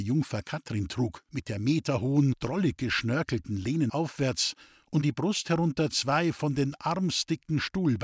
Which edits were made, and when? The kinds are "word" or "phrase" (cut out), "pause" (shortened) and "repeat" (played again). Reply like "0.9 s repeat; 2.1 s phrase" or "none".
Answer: 1.3 s pause; 3.9 s word; 5.0 s word